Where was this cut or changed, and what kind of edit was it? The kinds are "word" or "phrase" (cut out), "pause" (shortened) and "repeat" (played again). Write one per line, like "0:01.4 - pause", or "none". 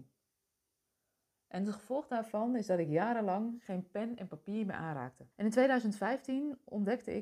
0:05.3 - pause

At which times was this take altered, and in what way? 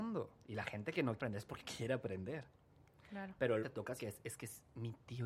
0:01.2 - word
0:01.6 - word
0:03.6 - word
0:04.0 - word

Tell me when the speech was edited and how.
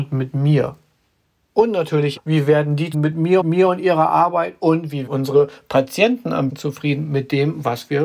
0:02.2 - word
0:02.9 - word
0:03.4 - repeat
0:05.1 - word
0:06.5 - word

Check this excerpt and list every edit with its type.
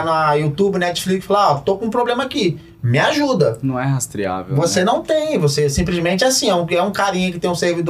none

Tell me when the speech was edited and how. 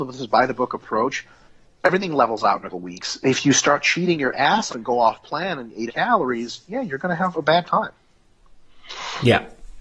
0:02.7 - word
0:04.7 - word
0:05.9 - word
0:07.3 - word

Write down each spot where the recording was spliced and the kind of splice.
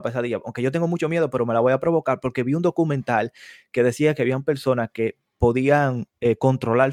none

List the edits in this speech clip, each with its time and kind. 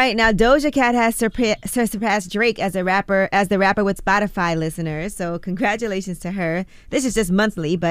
0:04.0 - phrase

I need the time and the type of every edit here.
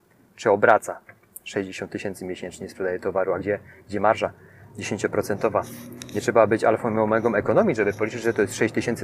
none

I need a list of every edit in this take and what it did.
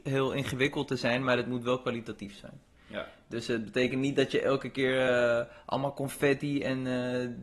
none

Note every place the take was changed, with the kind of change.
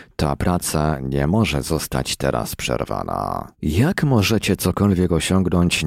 0:03.5 - pause

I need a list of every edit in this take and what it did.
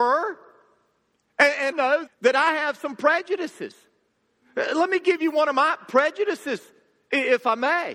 0:01.7 - word
0:02.1 - word

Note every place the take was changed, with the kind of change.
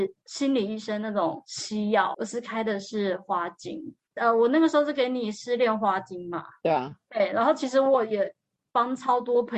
0:02.1 - word

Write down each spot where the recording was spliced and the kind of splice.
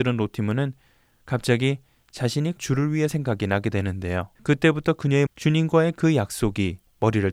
0:02.6 - word
0:03.1 - phrase
0:04.4 - pause
0:05.3 - word

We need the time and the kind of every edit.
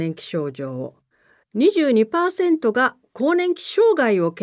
none

